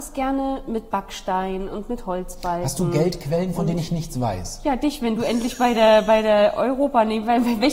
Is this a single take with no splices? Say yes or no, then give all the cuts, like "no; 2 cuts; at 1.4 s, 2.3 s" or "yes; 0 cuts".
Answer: yes; 0 cuts